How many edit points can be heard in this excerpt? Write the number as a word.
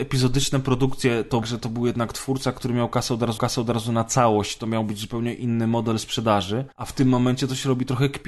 three